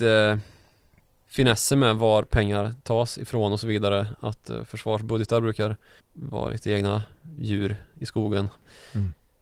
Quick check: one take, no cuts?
no; 1 cut; at 6.0 s

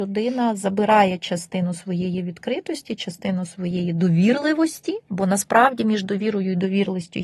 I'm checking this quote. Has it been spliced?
yes; 1 cut; at 5.0 s

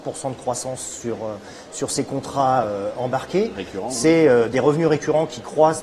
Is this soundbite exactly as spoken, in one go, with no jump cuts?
yes; 0 cuts

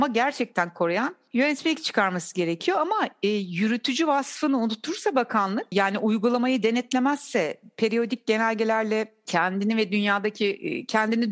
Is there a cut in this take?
no; 0 cuts

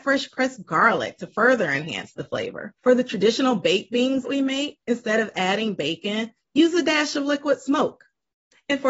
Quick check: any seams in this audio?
yes; 3 cuts; at 2.8 s, 4.2 s, 4.8 s

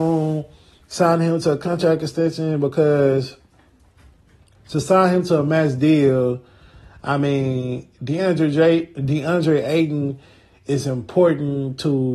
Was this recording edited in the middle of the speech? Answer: no; 0 cuts

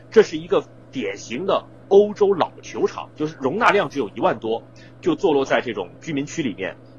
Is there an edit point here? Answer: yes; 1 cut; at 3.1 s

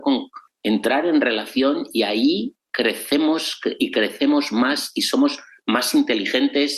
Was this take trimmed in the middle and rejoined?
no; 0 cuts

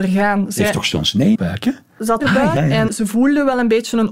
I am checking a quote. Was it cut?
yes; 4 cuts; at 1.4 s, 2.2 s, 2.6 s, 2.9 s

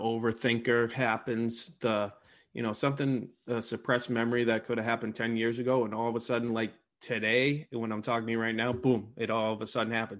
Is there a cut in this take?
no; 0 cuts

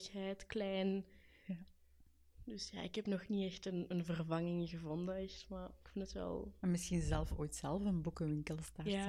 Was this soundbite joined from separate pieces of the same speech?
no; 0 cuts

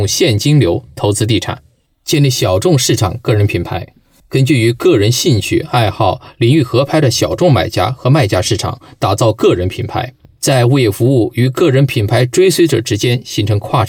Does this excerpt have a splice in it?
no; 0 cuts

